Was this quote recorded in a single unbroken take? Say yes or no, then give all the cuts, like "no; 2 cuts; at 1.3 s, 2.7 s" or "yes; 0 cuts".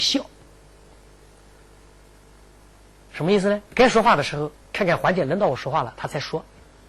no; 2 cuts; at 3.7 s, 4.6 s